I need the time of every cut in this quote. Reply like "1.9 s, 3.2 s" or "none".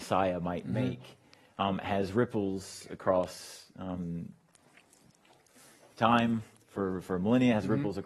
none